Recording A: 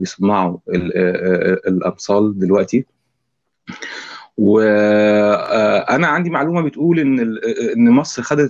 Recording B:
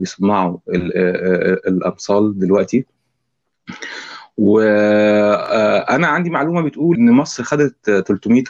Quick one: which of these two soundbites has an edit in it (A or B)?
B